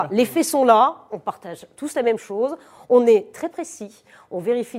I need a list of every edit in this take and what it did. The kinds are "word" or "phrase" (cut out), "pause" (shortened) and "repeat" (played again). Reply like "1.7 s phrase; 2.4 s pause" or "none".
none